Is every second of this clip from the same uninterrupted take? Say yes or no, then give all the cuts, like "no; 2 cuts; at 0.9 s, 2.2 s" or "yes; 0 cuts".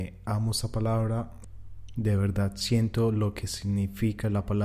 yes; 0 cuts